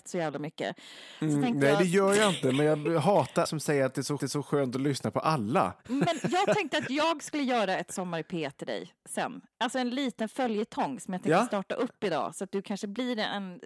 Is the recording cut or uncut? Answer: cut